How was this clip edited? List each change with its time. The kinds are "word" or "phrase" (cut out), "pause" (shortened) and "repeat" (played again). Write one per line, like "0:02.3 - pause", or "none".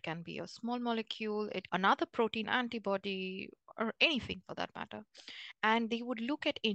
0:01.7 - phrase
0:02.4 - phrase